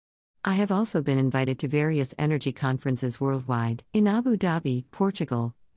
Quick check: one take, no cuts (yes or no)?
no